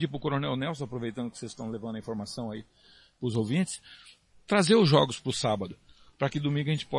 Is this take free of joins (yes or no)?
yes